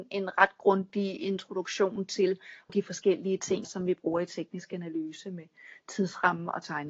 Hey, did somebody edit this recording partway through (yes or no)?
yes